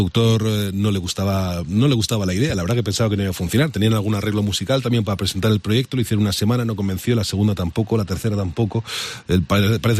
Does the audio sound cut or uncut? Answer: uncut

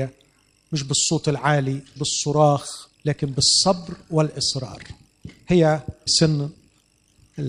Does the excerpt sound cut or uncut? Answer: cut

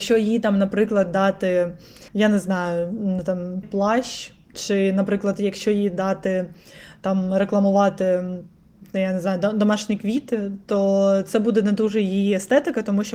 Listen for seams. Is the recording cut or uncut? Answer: cut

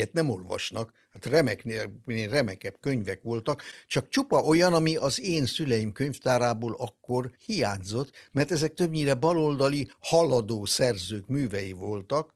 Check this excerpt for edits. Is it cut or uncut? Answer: cut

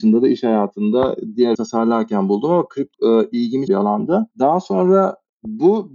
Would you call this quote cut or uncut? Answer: cut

